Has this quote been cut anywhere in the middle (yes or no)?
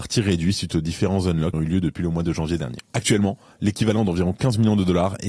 yes